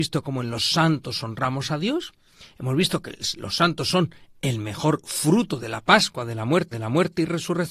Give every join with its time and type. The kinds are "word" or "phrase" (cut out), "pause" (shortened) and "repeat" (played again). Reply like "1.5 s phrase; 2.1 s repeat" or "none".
6.7 s repeat